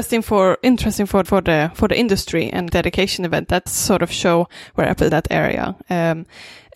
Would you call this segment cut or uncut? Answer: cut